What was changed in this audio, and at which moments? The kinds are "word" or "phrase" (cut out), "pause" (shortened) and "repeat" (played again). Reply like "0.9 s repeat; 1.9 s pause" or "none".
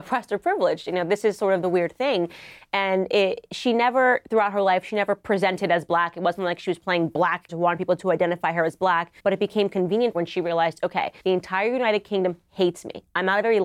7.5 s word; 9.2 s pause; 10.1 s phrase; 11.2 s pause

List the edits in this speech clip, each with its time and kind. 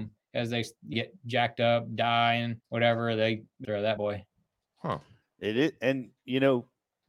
0.9 s word; 2.6 s pause; 3.6 s phrase; 4.0 s word

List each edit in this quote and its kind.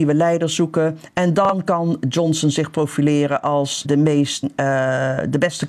3.8 s word; 4.4 s word

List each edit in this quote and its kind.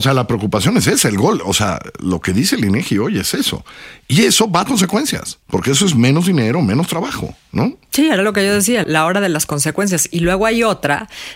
4.7 s word; 5.4 s pause; 8.8 s word

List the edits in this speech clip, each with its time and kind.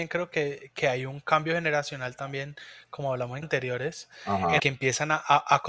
3.4 s word; 4.6 s word

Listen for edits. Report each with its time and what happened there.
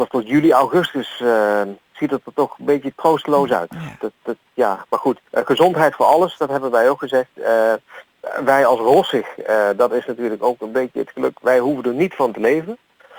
5.2 s pause

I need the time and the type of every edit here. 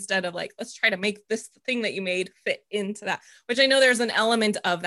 none

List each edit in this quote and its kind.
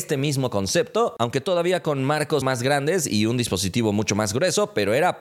2.4 s word

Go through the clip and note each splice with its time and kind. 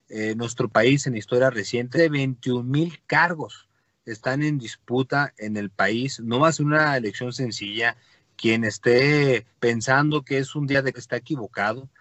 1.9 s word; 9.5 s pause; 10.9 s word

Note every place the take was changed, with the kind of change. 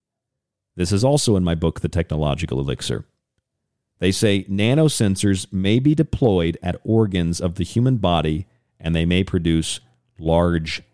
none

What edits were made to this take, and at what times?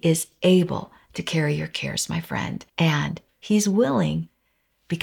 2.7 s pause

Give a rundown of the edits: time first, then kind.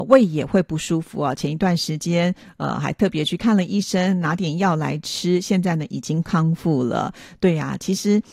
none

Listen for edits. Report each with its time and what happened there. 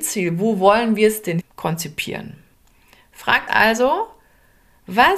1.4 s word; 3.5 s word

